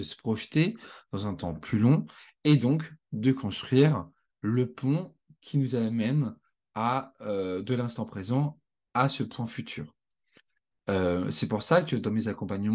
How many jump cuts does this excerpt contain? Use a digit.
0